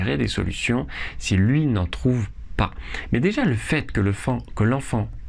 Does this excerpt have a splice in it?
no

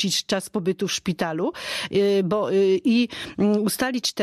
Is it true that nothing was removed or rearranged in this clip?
yes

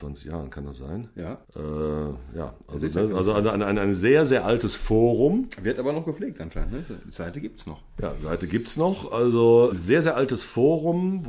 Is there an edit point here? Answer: yes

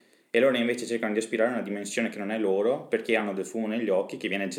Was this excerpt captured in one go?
yes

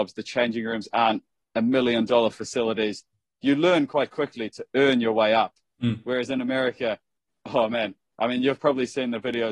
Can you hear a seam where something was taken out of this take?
no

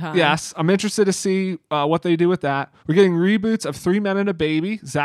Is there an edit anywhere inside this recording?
yes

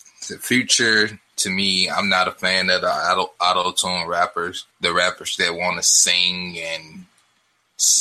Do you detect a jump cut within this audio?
yes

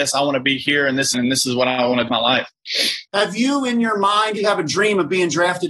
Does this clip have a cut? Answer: yes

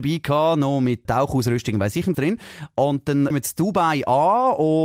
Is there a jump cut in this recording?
yes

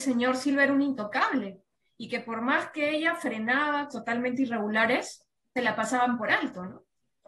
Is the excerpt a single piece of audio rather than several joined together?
no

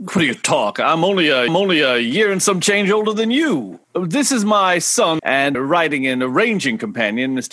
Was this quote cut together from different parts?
yes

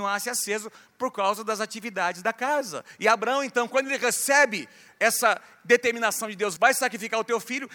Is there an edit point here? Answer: no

